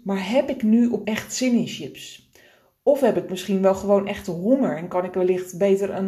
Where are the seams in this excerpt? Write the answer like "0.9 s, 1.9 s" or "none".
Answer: 1.0 s